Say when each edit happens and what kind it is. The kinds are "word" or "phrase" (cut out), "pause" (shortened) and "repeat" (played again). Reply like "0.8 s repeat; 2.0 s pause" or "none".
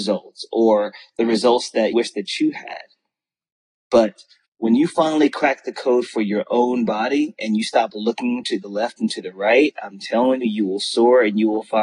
1.9 s word; 4.5 s pause; 10.4 s word